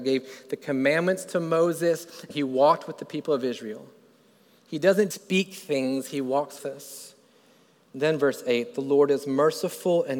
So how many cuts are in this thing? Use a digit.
3